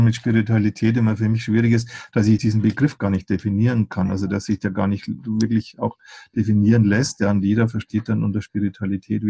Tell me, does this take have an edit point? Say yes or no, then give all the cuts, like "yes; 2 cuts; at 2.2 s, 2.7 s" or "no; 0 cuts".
no; 0 cuts